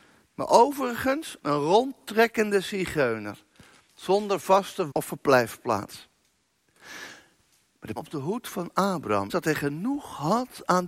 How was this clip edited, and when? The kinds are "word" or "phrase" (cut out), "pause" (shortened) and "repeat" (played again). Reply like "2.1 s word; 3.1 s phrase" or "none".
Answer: 1.4 s word; 4.9 s word; 8.0 s word; 9.3 s word